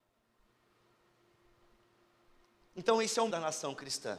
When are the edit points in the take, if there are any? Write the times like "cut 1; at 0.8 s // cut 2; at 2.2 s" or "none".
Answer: cut 1; at 3.3 s